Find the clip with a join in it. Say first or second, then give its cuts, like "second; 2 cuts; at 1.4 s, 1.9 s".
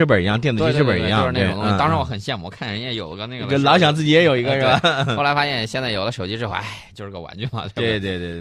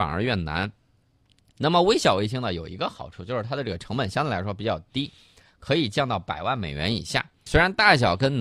second; 1 cut; at 7.5 s